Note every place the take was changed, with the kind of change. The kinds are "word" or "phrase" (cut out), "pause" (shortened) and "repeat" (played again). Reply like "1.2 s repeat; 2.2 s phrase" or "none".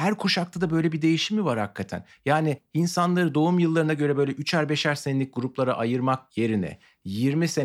none